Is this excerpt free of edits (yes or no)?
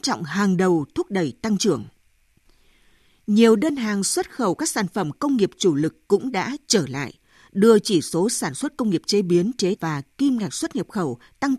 no